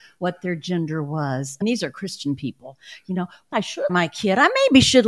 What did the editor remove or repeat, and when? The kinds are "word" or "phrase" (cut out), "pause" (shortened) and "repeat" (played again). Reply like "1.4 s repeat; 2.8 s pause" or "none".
1.6 s phrase; 3.5 s word; 3.9 s word